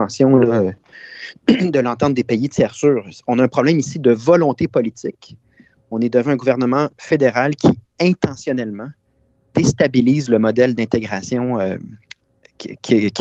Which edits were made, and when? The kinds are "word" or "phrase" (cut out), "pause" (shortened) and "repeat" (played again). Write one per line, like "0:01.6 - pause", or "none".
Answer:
none